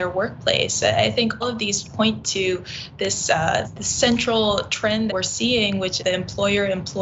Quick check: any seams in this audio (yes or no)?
yes